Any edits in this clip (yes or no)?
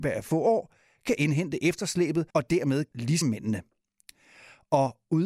yes